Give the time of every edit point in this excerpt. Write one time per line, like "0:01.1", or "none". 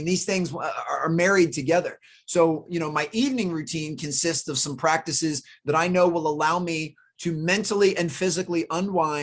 none